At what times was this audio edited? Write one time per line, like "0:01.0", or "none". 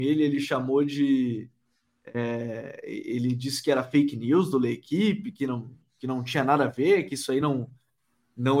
none